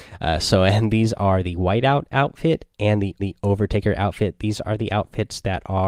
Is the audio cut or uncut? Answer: cut